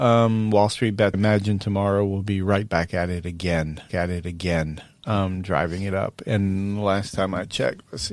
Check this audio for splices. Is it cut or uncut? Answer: cut